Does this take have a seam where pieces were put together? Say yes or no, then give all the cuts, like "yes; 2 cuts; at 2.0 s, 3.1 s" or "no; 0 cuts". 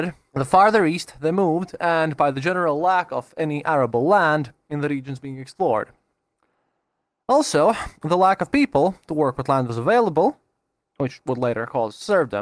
no; 0 cuts